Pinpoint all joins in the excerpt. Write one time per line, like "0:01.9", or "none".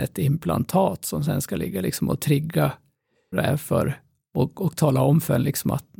0:03.3

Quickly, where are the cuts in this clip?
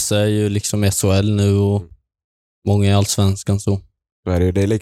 none

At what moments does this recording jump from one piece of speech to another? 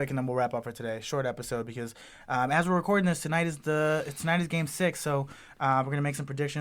none

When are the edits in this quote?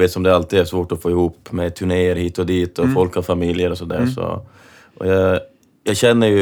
none

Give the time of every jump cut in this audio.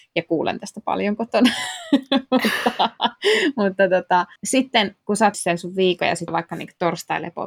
0:04.4
0:05.3
0:06.3

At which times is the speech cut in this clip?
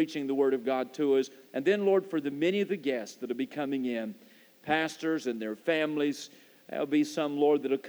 none

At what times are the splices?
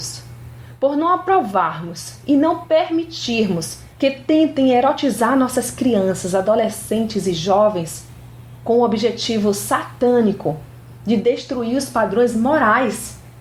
0:03.9

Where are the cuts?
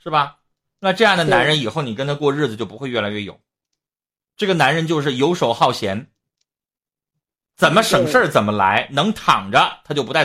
none

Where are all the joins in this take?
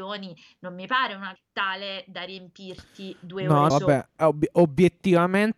0:01.4
0:03.7
0:04.2

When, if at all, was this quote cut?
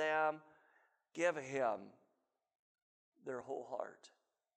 none

